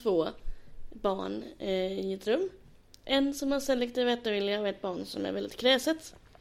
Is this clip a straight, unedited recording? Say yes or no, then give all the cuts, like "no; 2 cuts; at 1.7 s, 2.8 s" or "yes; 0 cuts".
yes; 0 cuts